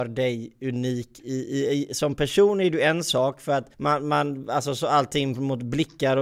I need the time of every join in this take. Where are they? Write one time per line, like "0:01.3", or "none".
0:03.7